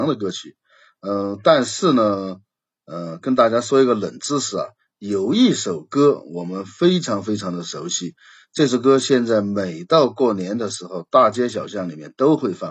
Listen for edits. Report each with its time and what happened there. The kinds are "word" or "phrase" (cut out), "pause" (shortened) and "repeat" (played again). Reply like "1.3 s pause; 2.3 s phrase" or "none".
none